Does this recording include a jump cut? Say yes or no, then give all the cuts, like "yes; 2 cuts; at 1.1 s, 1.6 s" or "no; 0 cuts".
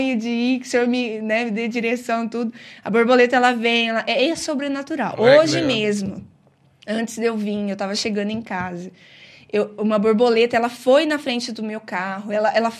no; 0 cuts